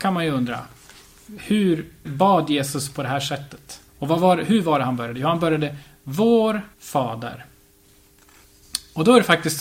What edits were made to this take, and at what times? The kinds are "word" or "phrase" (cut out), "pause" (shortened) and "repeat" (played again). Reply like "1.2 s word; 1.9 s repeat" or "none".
2.1 s word; 3.9 s pause; 6.7 s pause